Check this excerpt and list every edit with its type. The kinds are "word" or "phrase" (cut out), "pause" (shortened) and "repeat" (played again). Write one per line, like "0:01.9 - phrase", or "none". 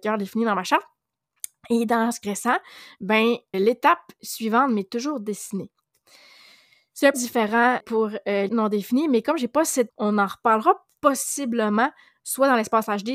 0:02.2 - word
0:03.5 - word
0:07.1 - word
0:07.8 - word
0:08.5 - word
0:09.9 - word